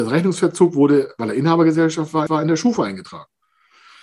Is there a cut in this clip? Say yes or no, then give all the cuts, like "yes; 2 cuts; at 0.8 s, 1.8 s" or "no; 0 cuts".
yes; 1 cut; at 2.3 s